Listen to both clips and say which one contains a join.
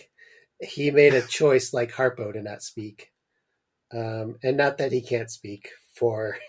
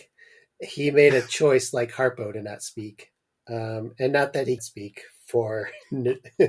second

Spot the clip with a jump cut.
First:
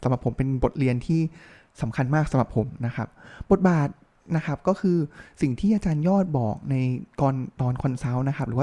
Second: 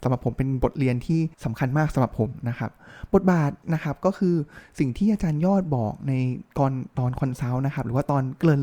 second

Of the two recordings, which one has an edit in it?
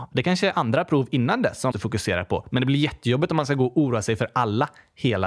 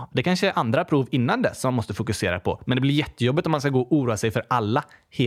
first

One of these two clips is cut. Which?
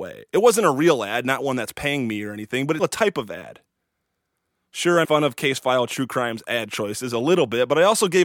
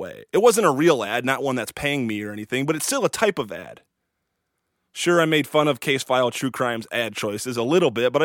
first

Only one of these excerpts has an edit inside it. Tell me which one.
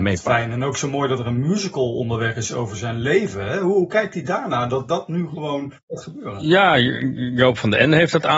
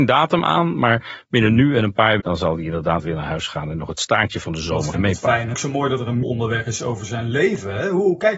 second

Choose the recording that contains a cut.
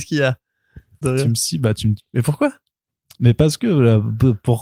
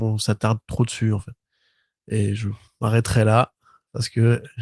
first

